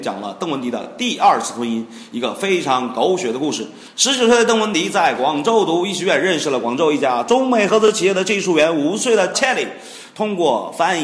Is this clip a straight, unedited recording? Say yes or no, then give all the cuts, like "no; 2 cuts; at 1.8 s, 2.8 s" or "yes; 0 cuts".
no; 1 cut; at 9.3 s